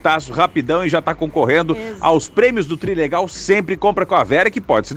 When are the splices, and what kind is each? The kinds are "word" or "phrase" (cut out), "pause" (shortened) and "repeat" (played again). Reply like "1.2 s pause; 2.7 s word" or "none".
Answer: none

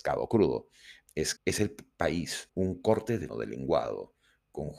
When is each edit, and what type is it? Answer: 1.1 s word; 1.4 s word; 2.5 s word; 3.3 s word

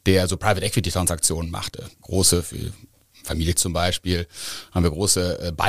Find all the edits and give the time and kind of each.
1.9 s pause; 3.5 s word

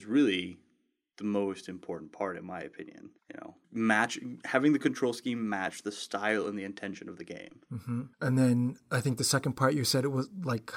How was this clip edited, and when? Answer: 3.2 s pause; 3.6 s pause; 8.1 s pause

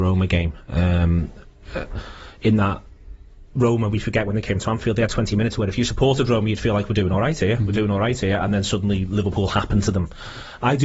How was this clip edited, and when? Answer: none

